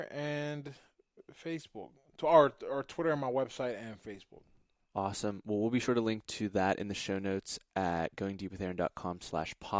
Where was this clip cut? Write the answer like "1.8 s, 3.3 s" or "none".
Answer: none